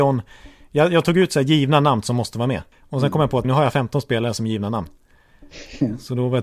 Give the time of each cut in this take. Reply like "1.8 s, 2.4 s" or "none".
2.7 s, 3.4 s